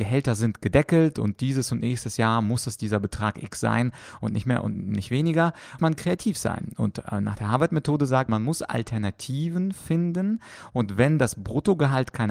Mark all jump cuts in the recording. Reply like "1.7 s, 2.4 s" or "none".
5.8 s, 8.3 s